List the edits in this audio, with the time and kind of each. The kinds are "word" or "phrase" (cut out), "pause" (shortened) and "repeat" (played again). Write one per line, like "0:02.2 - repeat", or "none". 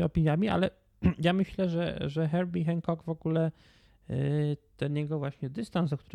none